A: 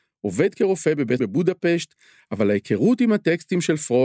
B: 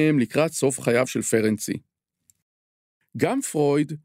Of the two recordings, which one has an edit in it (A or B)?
A